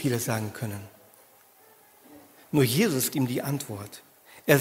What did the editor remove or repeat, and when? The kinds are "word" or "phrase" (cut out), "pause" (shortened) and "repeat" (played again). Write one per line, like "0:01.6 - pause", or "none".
0:03.1 - word